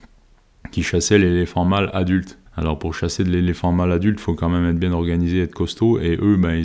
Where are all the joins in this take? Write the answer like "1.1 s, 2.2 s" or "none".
2.5 s